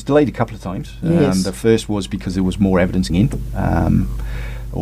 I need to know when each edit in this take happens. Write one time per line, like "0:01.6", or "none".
0:03.1